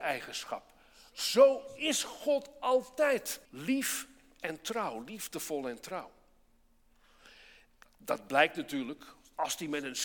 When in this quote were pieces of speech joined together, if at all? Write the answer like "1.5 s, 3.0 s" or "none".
3.4 s